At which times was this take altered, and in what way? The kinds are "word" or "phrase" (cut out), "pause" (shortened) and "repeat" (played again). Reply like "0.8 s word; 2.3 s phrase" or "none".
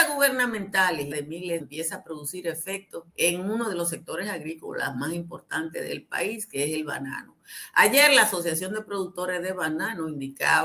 1.1 s phrase; 1.6 s phrase; 3.1 s pause